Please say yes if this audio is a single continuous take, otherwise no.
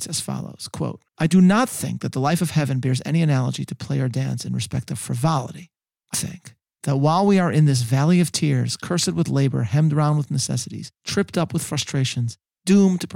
no